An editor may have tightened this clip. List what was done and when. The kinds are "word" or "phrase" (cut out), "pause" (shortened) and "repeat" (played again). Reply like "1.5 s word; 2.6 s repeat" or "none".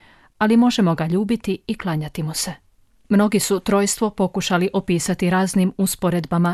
none